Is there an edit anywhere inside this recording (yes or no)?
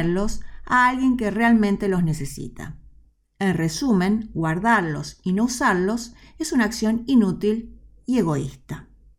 no